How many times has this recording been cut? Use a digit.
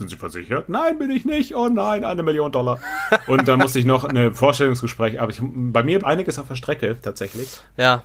1